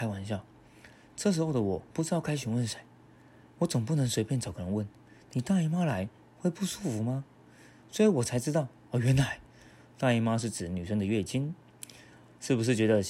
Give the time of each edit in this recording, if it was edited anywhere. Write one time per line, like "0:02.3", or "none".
0:01.9